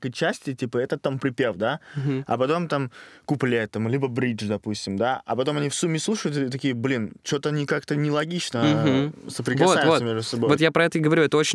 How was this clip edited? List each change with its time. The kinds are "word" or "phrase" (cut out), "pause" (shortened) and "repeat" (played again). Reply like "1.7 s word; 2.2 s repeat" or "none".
none